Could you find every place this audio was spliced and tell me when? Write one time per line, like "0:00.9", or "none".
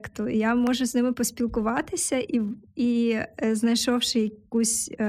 none

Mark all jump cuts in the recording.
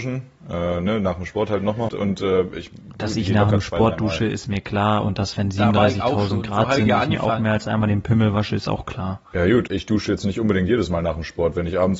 0:01.9
0:09.7

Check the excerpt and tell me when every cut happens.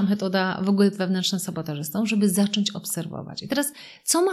0:00.9

